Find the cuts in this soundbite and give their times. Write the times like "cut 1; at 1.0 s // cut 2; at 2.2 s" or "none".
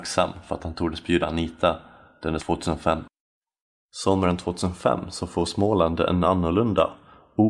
cut 1; at 1.2 s // cut 2; at 2.4 s